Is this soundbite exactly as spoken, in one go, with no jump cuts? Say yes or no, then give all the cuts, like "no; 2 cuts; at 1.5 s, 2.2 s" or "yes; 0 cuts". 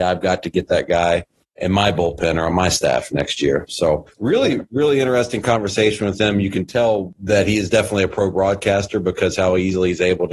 yes; 0 cuts